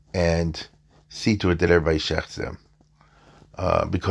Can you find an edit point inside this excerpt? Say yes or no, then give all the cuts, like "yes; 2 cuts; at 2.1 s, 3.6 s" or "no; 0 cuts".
no; 0 cuts